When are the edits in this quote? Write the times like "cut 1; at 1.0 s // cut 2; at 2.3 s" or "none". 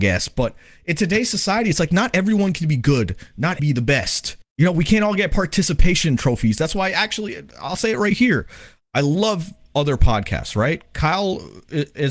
cut 1; at 3.6 s // cut 2; at 4.4 s

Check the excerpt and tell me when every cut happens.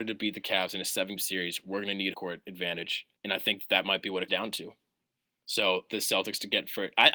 cut 1; at 1.2 s // cut 2; at 2.1 s // cut 3; at 3.2 s // cut 4; at 4.3 s // cut 5; at 5.9 s

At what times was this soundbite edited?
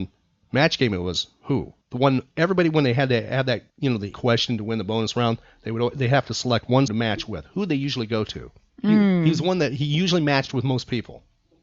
cut 1; at 1.8 s // cut 2; at 3.7 s // cut 3; at 4.1 s // cut 4; at 6.9 s // cut 5; at 8.7 s

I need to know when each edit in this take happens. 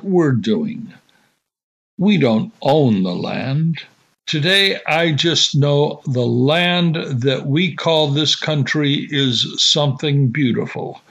none

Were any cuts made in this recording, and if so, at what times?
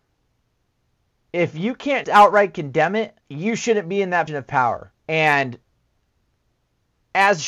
cut 1; at 2.0 s // cut 2; at 3.2 s // cut 3; at 4.3 s // cut 4; at 5.0 s

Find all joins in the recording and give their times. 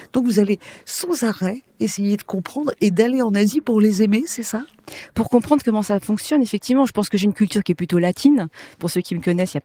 none

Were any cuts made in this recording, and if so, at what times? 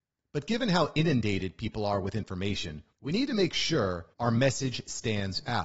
cut 1; at 2.9 s // cut 2; at 4.1 s

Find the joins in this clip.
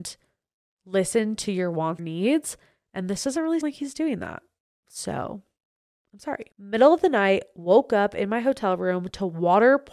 cut 1; at 2.0 s // cut 2; at 3.6 s // cut 3; at 6.5 s

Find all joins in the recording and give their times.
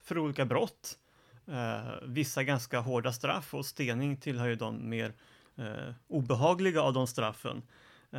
none

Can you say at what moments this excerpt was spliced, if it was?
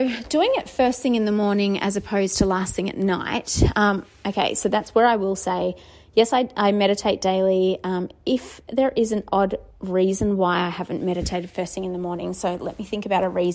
cut 1; at 9.7 s

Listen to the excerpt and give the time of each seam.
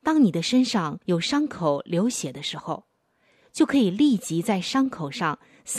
cut 1; at 1.0 s

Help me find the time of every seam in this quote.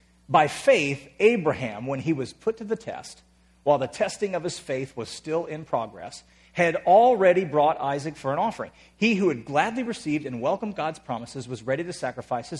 none

